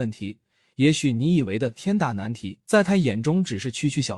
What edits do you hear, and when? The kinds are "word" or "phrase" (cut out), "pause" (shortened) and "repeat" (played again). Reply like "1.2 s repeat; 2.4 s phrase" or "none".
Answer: 2.6 s pause